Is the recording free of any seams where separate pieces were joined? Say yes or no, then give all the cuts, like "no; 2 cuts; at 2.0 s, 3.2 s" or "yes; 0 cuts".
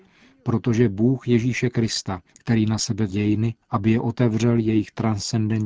no; 3 cuts; at 2.3 s, 3.1 s, 3.6 s